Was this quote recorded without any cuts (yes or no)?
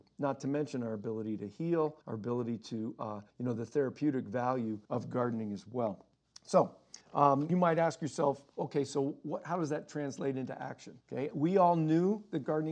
no